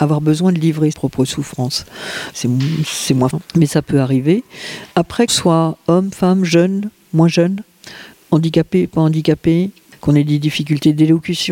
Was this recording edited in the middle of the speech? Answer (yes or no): yes